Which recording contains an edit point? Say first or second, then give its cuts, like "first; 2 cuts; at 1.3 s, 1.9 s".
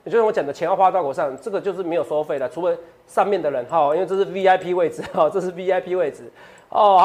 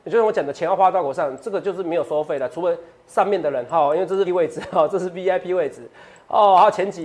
second; 1 cut; at 4.3 s